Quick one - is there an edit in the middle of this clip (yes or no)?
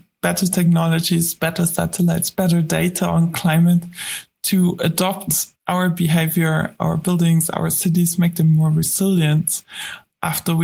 yes